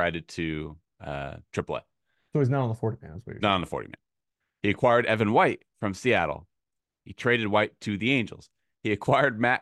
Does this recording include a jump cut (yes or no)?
no